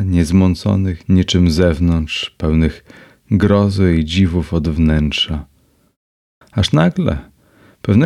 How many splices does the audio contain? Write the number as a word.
zero